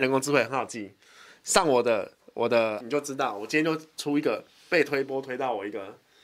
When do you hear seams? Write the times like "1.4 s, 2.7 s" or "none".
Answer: 2.8 s